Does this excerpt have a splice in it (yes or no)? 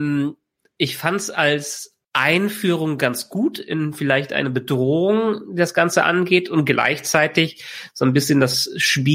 yes